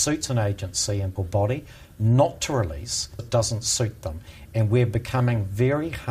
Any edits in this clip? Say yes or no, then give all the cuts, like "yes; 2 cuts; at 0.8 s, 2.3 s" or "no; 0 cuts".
yes; 2 cuts; at 1.2 s, 3.2 s